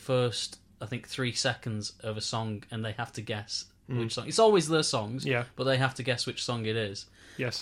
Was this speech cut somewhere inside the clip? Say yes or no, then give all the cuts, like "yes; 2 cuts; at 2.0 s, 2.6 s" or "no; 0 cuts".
no; 0 cuts